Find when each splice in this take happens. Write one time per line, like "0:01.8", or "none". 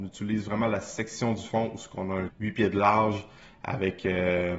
0:02.3